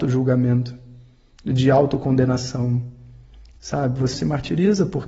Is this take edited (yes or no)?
yes